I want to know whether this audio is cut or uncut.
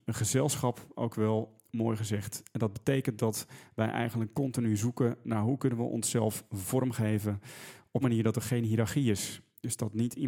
cut